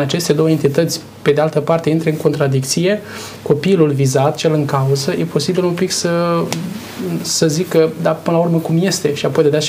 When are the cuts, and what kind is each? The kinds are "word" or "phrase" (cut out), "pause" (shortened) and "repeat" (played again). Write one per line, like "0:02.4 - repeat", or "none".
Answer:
none

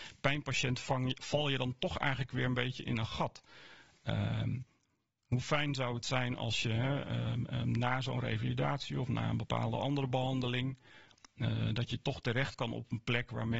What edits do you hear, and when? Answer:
none

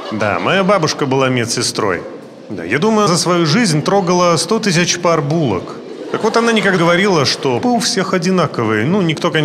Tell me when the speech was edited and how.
0:03.1 - word
0:06.8 - word
0:07.6 - word

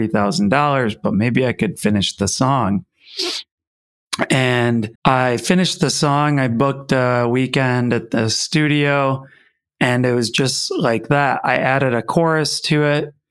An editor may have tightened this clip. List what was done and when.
0:05.0 - pause

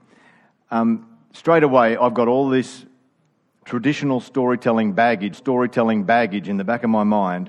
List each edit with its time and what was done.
0:05.3 - repeat

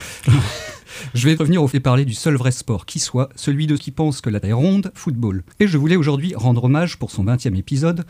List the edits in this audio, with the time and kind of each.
0:01.4 - word
0:01.7 - word
0:03.8 - word
0:04.4 - word
0:04.9 - word
0:05.5 - pause

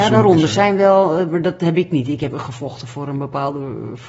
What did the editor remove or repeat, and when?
0:02.3 - word

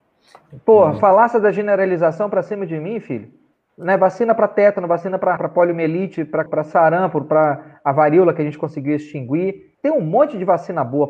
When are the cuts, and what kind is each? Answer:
0:03.5 - pause
0:05.4 - word
0:06.5 - word
0:09.7 - pause

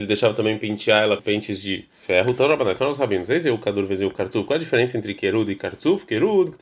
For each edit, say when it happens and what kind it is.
0:01.2 - word

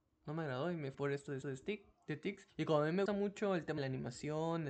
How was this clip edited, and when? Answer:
0:00.9 - word
0:01.4 - repeat
0:02.5 - pause
0:03.1 - word
0:03.8 - word

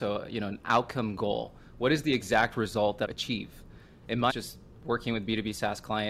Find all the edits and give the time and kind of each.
0:03.0 - phrase
0:04.3 - word

